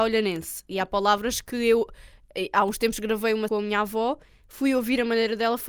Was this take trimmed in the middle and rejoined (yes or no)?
yes